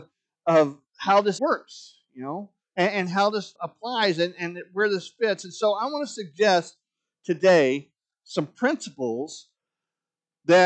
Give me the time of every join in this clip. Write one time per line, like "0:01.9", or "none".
0:01.4
0:03.6